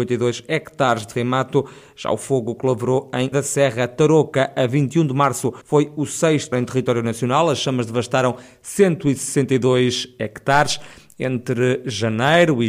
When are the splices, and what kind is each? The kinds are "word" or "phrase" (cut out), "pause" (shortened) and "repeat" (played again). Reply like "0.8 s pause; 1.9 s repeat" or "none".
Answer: 1.1 s word; 3.3 s word; 5.6 s pause; 6.5 s word